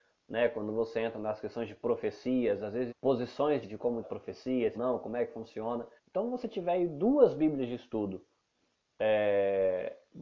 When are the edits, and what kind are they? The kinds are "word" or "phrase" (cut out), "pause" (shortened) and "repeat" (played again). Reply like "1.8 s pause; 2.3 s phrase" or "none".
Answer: 2.9 s word; 3.6 s word; 4.0 s phrase; 4.7 s phrase; 6.0 s pause